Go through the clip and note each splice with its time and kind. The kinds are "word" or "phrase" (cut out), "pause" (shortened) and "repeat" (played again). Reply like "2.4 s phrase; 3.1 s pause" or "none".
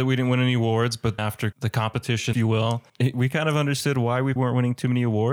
1.2 s word; 1.5 s phrase; 2.3 s phrase; 2.9 s pause; 4.4 s word